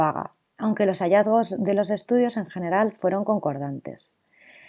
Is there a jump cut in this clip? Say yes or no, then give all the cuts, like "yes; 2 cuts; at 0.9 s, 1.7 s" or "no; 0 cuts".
no; 0 cuts